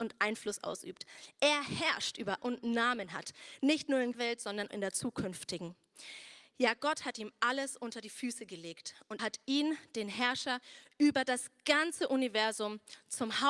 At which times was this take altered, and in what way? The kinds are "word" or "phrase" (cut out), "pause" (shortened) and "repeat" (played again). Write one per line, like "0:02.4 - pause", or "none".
0:02.4 - phrase
0:04.1 - word
0:04.7 - word
0:09.2 - word